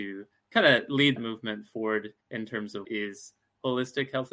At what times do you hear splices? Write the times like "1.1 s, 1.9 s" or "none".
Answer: 1.2 s, 2.2 s, 2.8 s